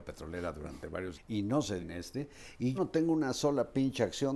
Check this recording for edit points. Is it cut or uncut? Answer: cut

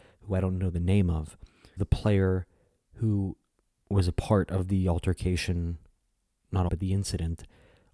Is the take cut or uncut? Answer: cut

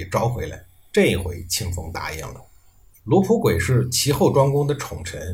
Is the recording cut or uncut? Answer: uncut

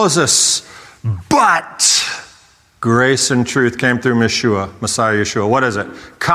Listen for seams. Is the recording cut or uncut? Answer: uncut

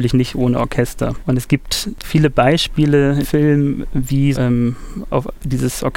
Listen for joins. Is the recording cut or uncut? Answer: cut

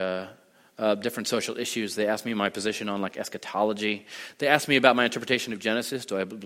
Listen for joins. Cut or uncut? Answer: uncut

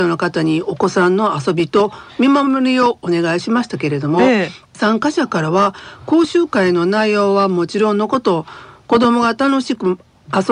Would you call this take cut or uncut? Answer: uncut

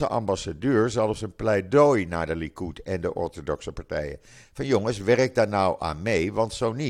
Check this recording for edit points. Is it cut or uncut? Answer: uncut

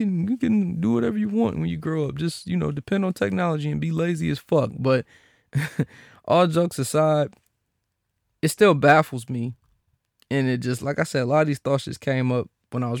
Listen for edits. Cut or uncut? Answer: uncut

